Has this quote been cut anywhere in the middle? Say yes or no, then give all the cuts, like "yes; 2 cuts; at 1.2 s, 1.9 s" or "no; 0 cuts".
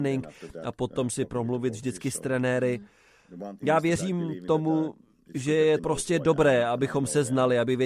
yes; 1 cut; at 5.8 s